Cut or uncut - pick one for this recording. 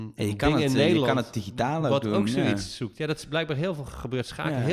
uncut